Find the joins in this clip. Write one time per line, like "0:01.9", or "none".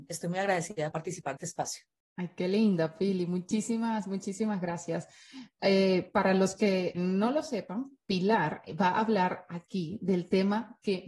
0:00.9
0:01.4
0:06.9